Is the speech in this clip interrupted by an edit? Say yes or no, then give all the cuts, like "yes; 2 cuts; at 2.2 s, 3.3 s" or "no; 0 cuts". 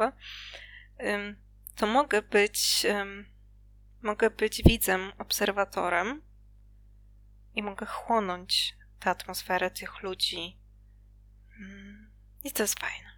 no; 0 cuts